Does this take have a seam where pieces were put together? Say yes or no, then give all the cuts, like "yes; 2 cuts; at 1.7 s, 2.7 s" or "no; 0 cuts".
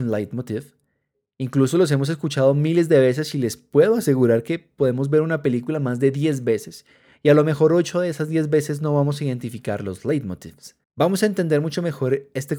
yes; 1 cut; at 10.8 s